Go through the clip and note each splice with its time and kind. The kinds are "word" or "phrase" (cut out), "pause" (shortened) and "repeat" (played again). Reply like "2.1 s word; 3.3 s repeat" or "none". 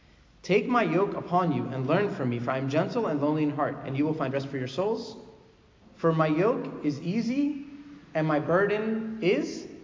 none